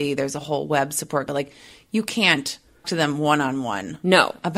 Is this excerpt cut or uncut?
cut